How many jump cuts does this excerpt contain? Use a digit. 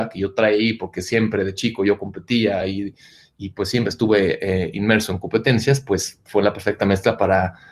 0